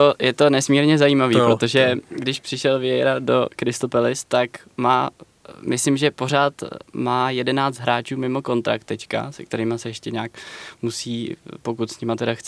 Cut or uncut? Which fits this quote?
cut